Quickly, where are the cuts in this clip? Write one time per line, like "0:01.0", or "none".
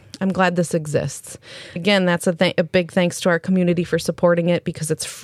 0:01.8